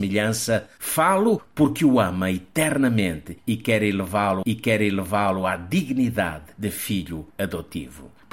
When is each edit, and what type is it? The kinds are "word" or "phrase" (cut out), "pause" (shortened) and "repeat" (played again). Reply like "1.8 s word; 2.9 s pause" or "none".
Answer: 4.4 s repeat; 7.3 s pause